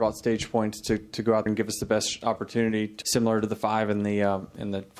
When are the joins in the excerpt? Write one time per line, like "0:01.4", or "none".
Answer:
0:01.5
0:03.0